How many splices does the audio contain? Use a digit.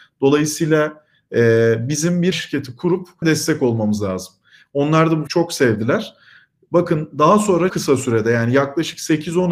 4